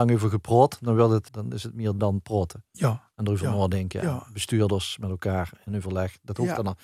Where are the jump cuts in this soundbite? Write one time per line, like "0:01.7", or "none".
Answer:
0:01.3
0:02.0